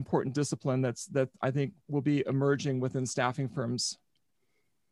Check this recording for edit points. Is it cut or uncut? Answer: uncut